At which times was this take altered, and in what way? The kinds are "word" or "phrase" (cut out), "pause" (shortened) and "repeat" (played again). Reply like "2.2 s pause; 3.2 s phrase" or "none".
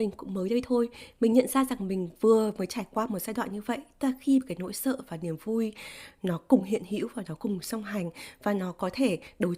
none